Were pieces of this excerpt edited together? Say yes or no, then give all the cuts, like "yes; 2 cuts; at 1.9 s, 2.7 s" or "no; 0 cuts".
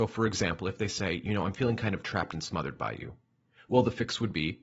no; 0 cuts